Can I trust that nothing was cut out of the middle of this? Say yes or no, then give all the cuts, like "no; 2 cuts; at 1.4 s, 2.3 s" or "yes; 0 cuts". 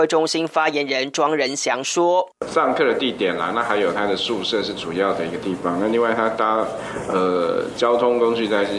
no; 1 cut; at 2.4 s